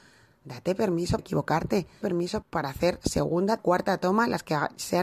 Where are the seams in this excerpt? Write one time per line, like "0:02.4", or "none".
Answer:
0:01.2
0:02.0
0:02.4
0:03.6